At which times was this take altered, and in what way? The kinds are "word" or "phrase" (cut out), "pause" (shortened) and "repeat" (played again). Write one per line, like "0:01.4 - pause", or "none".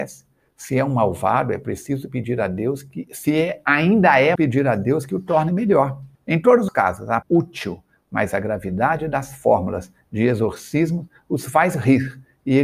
0:04.4 - phrase
0:06.1 - pause
0:06.7 - word
0:07.2 - phrase